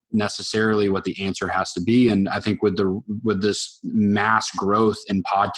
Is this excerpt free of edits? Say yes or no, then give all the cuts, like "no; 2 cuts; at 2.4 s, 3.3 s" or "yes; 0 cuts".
yes; 0 cuts